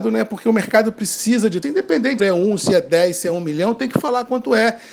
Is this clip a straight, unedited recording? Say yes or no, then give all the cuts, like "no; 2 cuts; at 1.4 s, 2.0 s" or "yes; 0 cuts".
no; 2 cuts; at 1.6 s, 2.2 s